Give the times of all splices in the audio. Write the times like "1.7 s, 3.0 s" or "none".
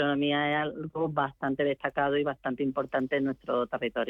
none